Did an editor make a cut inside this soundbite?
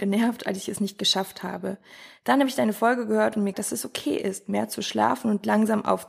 yes; 1 cut; at 3.5 s

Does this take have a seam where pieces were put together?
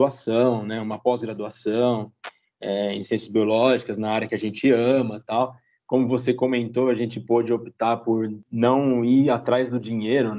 no; 0 cuts

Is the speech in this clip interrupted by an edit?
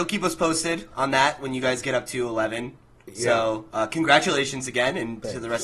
no; 0 cuts

